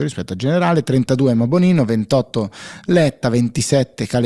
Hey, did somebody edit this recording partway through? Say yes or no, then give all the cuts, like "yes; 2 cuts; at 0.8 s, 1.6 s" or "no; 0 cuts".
no; 0 cuts